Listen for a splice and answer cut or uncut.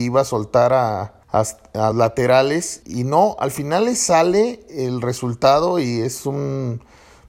cut